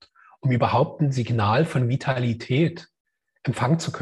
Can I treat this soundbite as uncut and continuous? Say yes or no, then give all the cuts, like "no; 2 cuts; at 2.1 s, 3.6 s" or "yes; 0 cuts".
yes; 0 cuts